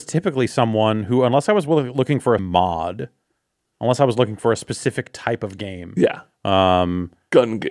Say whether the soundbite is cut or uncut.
cut